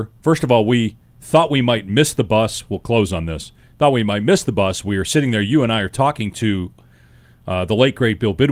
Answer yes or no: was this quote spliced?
no